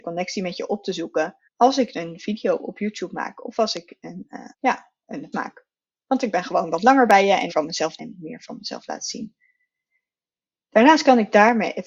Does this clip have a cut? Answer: yes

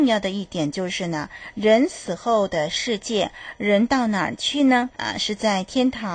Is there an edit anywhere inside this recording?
yes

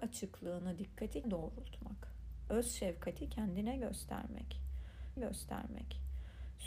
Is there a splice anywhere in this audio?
yes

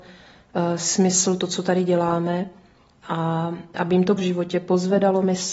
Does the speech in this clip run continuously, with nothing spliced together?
no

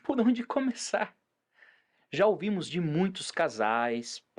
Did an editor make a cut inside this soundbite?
no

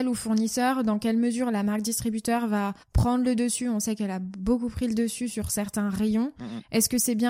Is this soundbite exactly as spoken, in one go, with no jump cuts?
no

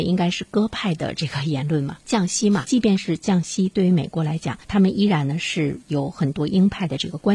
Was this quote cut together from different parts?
yes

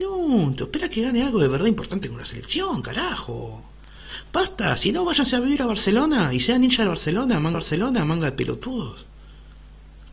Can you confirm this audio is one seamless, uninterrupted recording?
no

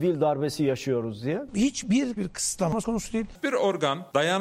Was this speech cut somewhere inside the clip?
yes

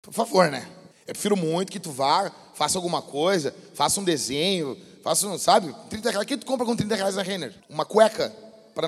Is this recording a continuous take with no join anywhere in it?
no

